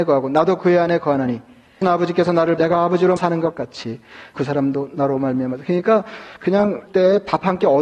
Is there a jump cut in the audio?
yes; 5 cuts; at 1.8 s, 2.6 s, 3.2 s, 4.4 s, 6.9 s

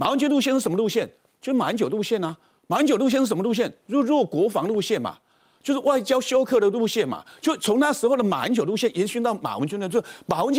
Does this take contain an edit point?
no; 0 cuts

